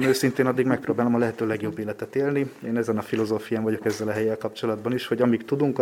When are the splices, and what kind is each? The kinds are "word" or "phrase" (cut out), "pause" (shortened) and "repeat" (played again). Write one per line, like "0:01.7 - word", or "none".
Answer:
none